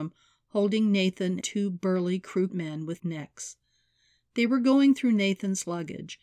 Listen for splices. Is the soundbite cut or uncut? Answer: cut